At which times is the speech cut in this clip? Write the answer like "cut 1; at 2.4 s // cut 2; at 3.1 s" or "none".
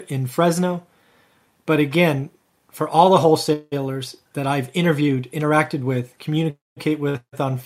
none

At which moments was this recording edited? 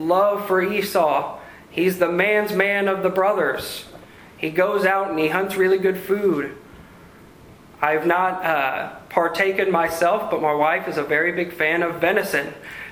none

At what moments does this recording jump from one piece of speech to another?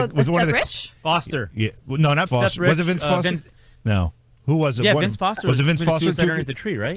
cut 1; at 2.3 s

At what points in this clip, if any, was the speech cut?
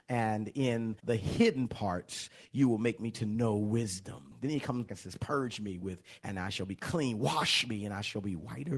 cut 1; at 1.0 s // cut 2; at 4.9 s // cut 3; at 6.2 s

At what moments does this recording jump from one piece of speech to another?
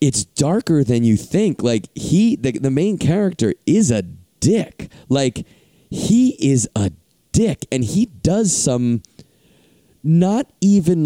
none

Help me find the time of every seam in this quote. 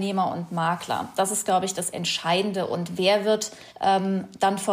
cut 1; at 3.7 s

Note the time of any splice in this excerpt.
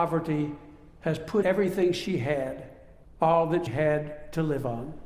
cut 1; at 1.4 s // cut 2; at 3.0 s // cut 3; at 3.7 s

